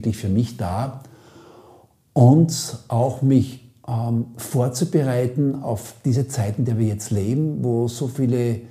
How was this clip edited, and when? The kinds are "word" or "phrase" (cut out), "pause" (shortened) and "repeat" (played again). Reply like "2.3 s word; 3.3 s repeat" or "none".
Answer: none